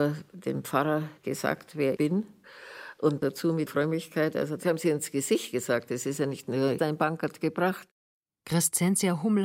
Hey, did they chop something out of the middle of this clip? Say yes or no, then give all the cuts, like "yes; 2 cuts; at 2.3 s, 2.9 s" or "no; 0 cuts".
yes; 3 cuts; at 2.0 s, 3.7 s, 6.8 s